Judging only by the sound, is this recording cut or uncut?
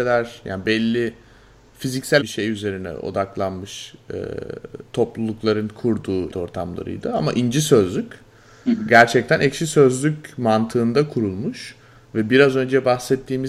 cut